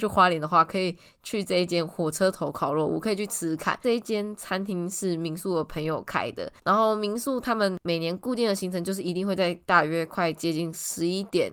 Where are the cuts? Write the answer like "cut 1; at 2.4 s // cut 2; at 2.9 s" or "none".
cut 1; at 6.6 s